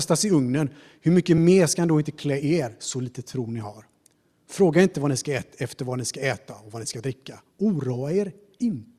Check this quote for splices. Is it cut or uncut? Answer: uncut